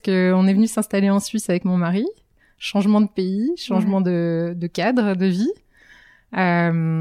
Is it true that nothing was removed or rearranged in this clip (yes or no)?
yes